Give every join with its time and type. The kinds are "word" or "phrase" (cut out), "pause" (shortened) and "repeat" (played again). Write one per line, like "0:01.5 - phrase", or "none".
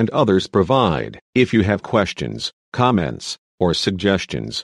0:01.2 - pause

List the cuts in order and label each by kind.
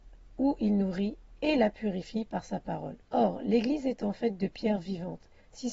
0:03.0 - pause

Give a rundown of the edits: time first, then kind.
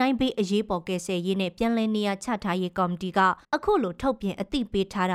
0:03.4 - pause

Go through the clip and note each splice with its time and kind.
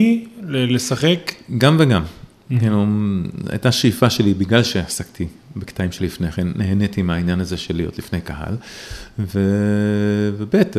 0:06.0 - word

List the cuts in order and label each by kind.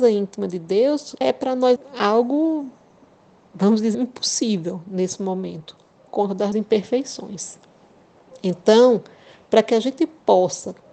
0:01.2 - word
0:01.8 - word
0:03.9 - word
0:06.1 - word
0:06.5 - word

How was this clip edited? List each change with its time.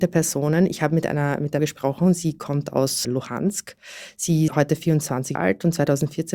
0:01.6 - phrase
0:03.0 - word
0:04.5 - word
0:05.3 - word

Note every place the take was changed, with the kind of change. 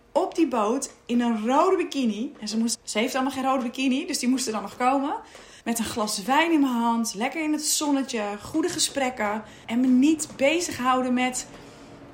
0:02.7 - phrase
0:05.6 - pause
0:09.6 - pause

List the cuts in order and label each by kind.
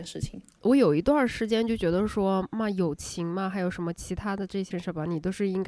0:04.7 - word

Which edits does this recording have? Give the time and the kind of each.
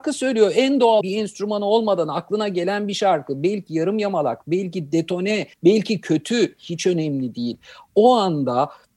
0:01.0 - word
0:05.5 - pause

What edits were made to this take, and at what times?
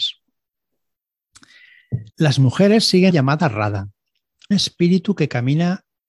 0:02.1 - pause
0:03.1 - phrase
0:04.5 - word

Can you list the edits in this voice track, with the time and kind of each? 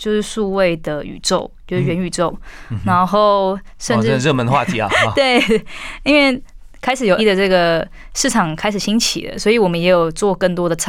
0:07.2 - word

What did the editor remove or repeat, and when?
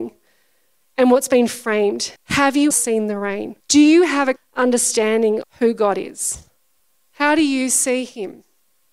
0:02.2 - pause
0:02.7 - word
0:03.6 - pause
0:04.4 - word
0:05.4 - word
0:06.8 - pause

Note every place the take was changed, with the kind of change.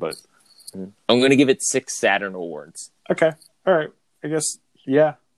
0:01.0 - pause
0:03.0 - pause

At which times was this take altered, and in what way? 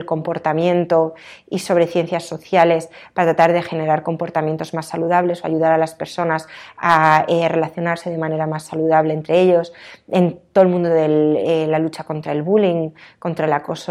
none

